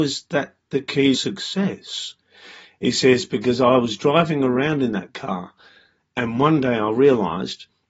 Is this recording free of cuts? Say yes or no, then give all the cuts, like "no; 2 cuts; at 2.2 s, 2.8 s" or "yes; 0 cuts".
no; 1 cut; at 1.1 s